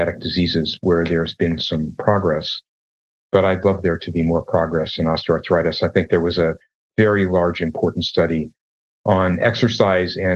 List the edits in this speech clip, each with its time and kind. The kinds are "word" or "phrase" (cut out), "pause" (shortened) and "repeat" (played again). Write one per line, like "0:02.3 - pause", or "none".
none

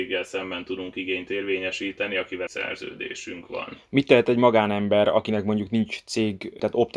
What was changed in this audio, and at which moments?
0:02.5 - word

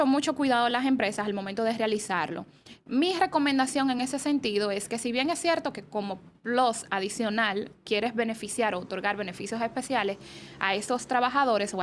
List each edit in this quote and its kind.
none

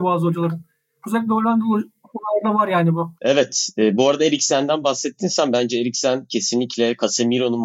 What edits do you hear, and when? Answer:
0:03.2 - pause

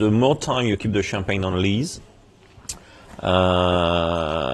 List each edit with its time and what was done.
none

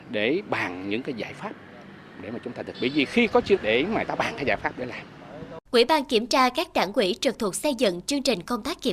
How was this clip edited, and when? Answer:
0:02.7 - word
0:03.6 - word
0:04.1 - word
0:05.7 - pause

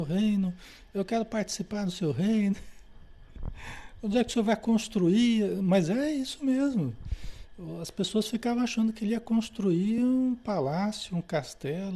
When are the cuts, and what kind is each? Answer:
none

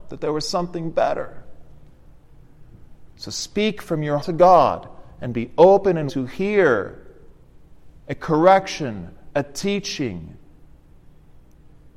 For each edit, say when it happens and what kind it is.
0:03.1 - pause
0:04.2 - word
0:06.1 - word

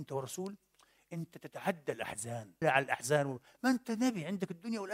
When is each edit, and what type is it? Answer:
0:02.6 - word

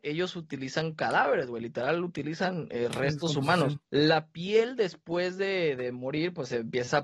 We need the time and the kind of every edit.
0:03.8 - pause

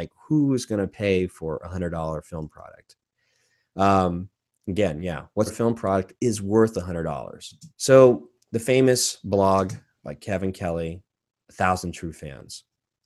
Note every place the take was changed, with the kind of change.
0:05.5 - word
0:07.7 - pause

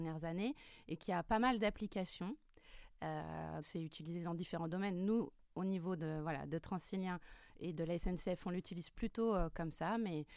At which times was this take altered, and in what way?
0:03.6 - word

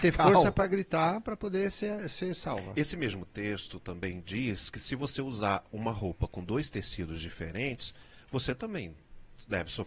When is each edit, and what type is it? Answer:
none

